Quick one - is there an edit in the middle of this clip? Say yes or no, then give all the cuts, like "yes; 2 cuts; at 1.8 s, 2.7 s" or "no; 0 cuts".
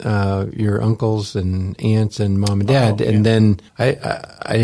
yes; 1 cut; at 3.7 s